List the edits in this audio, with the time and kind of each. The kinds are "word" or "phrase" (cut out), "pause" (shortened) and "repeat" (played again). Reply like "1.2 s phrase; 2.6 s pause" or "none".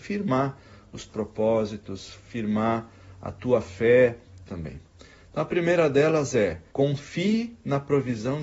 1.1 s word; 4.5 s phrase; 6.7 s pause